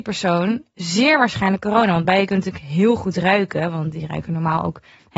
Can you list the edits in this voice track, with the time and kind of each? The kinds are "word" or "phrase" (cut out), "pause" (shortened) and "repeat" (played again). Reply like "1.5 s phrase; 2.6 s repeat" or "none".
none